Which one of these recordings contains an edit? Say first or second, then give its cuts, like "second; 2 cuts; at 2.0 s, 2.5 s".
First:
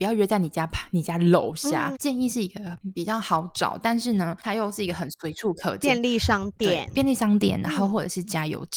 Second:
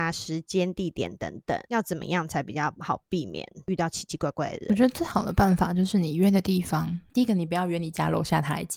first; 1 cut; at 2.0 s